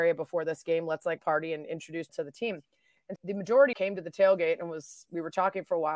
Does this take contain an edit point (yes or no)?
yes